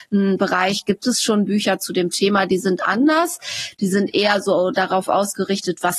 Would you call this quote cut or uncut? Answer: uncut